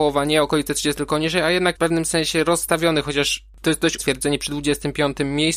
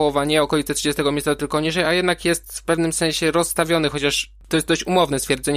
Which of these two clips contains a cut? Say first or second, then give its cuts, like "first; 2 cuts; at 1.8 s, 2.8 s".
first; 3 cuts; at 1.0 s, 1.8 s, 4.0 s